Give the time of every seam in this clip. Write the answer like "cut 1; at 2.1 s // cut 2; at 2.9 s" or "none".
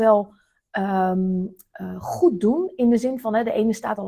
none